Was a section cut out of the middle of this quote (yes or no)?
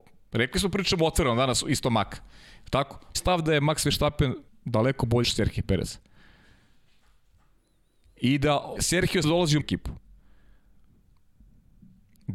yes